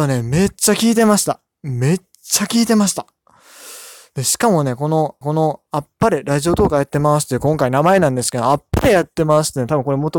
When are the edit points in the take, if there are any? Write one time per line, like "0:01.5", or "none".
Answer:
0:05.2